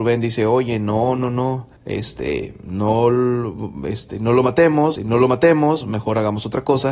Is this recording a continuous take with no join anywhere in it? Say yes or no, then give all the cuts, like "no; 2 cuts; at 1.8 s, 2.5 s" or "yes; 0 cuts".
no; 2 cuts; at 1.8 s, 5.0 s